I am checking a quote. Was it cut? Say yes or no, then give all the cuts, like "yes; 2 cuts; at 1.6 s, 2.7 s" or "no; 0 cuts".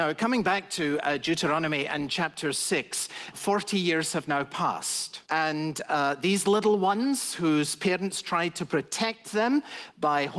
yes; 1 cut; at 5.2 s